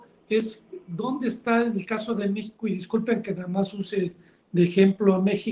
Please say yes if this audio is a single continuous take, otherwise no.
yes